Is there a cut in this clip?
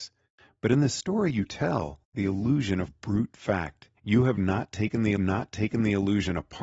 yes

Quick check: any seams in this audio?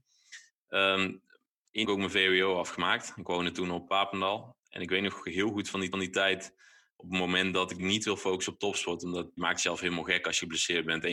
yes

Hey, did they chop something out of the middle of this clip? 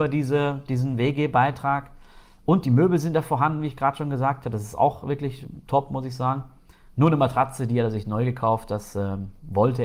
no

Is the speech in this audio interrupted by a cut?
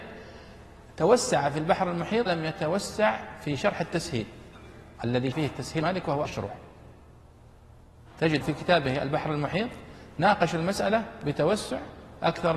yes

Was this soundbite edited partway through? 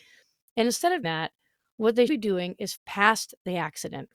yes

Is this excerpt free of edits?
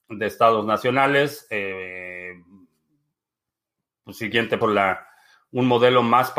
no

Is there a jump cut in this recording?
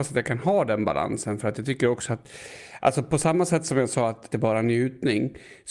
yes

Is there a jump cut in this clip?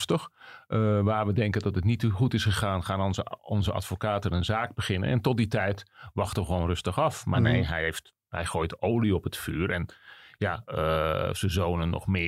no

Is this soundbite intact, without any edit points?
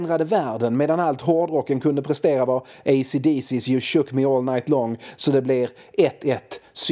yes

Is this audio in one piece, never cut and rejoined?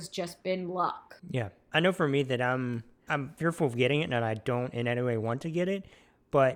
no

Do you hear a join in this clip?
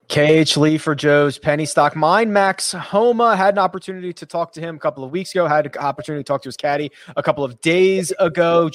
no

